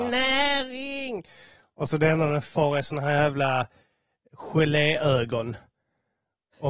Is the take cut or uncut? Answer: uncut